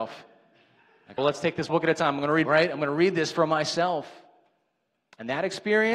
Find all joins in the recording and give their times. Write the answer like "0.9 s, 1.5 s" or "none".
1.2 s, 1.7 s, 2.4 s